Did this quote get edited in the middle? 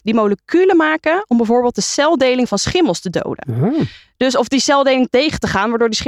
no; 0 cuts

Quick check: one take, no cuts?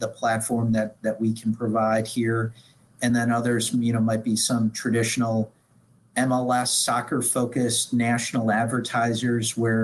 yes; 0 cuts

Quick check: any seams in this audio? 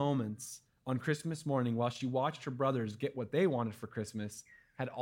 no; 0 cuts

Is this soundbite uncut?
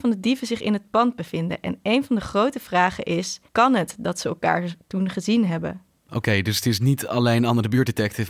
no; 1 cut; at 3.5 s

